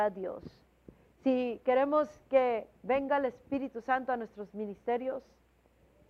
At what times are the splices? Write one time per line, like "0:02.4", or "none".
none